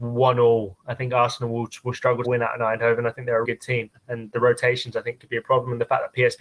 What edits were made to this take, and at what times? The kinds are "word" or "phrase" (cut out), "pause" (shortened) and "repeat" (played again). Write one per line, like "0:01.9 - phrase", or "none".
0:02.2 - phrase
0:03.4 - word
0:04.0 - pause

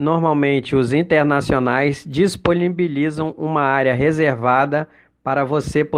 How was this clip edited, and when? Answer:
none

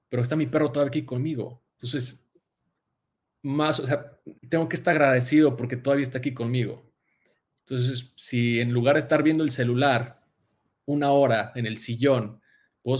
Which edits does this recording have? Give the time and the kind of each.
0:01.7 - pause
0:04.4 - pause

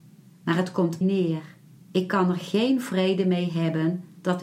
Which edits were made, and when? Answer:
0:01.0 - phrase
0:01.8 - pause

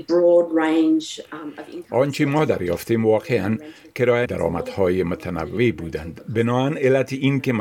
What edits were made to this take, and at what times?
0:04.3 - phrase

